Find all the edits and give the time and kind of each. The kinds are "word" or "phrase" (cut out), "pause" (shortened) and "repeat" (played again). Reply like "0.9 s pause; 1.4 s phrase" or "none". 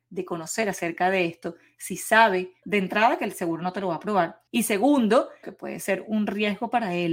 2.6 s word; 4.5 s pause; 5.4 s word